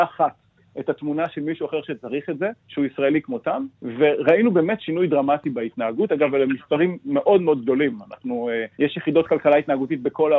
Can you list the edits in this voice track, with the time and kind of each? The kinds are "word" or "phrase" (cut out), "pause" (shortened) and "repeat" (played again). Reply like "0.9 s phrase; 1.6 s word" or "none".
2.6 s pause; 3.7 s pause; 8.7 s pause